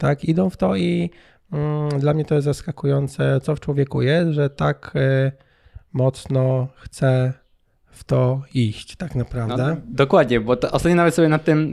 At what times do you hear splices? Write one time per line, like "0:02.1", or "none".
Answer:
none